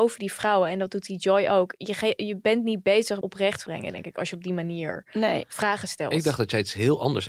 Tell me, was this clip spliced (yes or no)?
yes